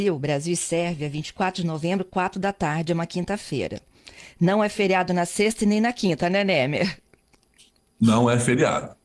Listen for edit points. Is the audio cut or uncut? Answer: uncut